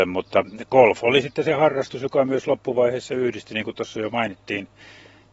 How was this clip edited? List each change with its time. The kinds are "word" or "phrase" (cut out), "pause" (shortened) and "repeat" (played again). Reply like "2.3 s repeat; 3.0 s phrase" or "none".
none

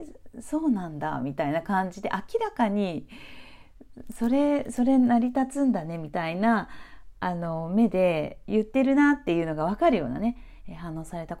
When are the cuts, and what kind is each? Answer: none

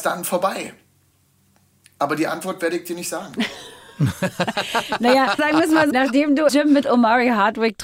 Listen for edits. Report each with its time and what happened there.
5.4 s word; 5.9 s word; 6.5 s word

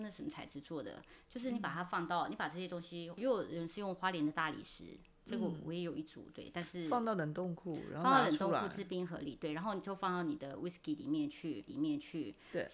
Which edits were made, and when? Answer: 3.2 s word; 11.7 s repeat

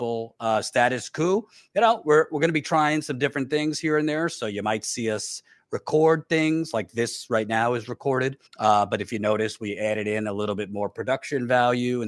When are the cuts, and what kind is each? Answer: 8.5 s pause

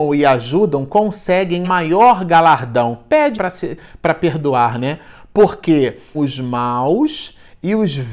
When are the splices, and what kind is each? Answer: 1.6 s word; 3.3 s word; 6.1 s word

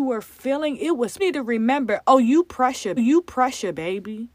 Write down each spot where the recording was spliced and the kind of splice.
1.2 s phrase; 3.0 s repeat

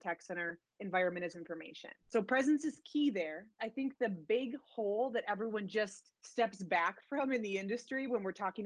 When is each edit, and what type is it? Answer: 1.3 s phrase; 2.0 s pause; 3.6 s word; 6.1 s pause

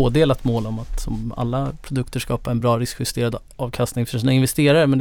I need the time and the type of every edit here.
none

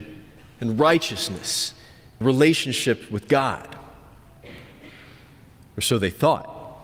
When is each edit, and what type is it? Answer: 2.2 s word

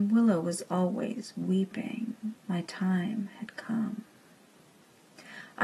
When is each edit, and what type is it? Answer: 2.4 s pause

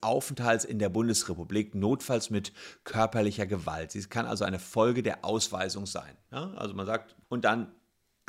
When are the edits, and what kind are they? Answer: 7.2 s phrase

